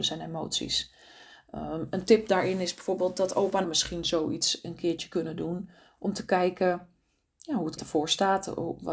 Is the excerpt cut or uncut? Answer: cut